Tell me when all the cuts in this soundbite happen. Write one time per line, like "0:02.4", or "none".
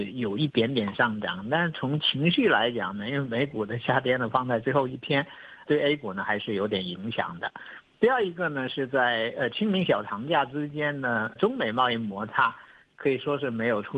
0:05.7
0:11.4

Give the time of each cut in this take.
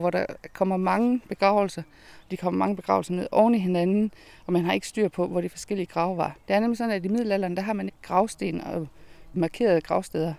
0:07.9
0:09.3

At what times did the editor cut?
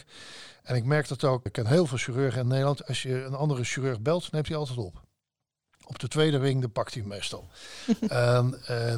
0:01.5

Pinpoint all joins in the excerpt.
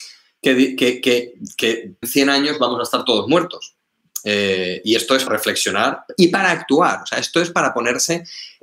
0:02.0
0:05.3

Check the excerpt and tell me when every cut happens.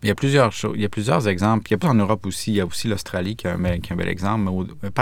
0:01.8

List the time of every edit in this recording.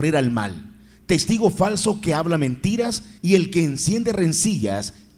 0:03.2

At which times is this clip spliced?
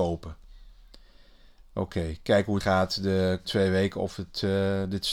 0:02.6
0:03.4

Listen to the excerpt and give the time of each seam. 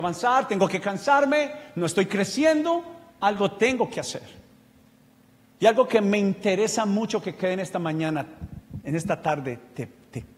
0:04.9

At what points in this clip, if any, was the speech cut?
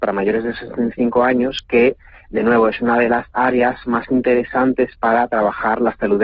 none

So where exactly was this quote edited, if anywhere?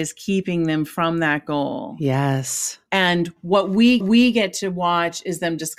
0:04.0

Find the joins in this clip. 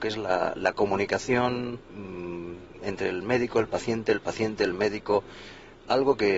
0:01.8

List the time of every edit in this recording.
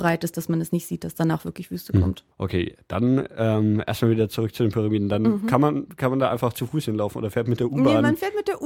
0:02.3

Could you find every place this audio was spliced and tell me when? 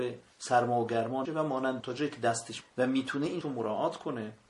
0:01.2
0:01.8
0:02.6
0:03.4

